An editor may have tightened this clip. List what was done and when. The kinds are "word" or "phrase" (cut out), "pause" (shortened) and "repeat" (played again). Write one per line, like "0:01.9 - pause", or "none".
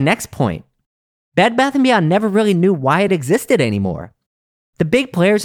none